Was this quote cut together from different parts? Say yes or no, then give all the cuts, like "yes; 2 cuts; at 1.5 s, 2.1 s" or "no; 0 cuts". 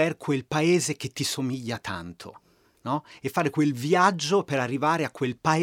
no; 0 cuts